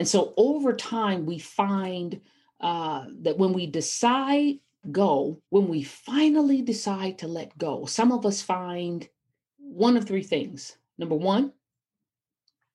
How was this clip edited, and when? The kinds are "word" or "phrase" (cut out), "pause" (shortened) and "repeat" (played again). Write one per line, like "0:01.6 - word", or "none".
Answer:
0:04.8 - phrase
0:05.4 - pause
0:09.4 - pause